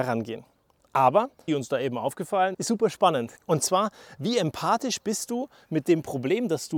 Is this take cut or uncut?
cut